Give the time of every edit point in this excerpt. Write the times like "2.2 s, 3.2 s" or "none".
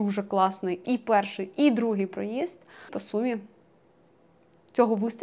2.9 s